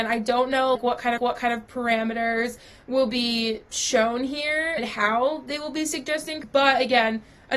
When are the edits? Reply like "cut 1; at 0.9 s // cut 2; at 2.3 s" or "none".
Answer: cut 1; at 1.2 s // cut 2; at 6.4 s